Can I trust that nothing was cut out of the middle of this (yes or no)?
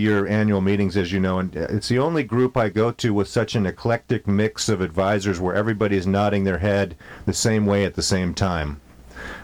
yes